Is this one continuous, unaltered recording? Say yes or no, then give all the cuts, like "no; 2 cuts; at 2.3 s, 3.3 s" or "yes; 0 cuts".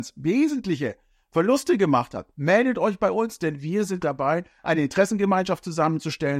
yes; 0 cuts